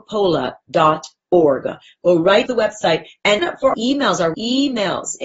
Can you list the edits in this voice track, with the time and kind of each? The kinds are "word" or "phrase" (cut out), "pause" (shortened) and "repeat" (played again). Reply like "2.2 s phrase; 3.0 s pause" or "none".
2.5 s word; 3.4 s word; 3.7 s word; 4.3 s word